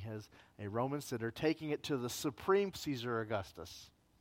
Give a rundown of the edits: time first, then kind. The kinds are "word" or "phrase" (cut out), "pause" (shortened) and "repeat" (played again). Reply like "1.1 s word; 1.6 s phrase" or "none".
2.7 s phrase